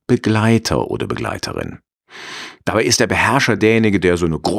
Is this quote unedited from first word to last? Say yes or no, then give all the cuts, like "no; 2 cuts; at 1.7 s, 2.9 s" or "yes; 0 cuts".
yes; 0 cuts